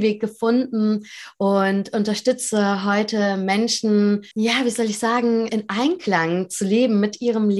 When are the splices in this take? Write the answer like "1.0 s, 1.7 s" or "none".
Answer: 4.3 s, 5.5 s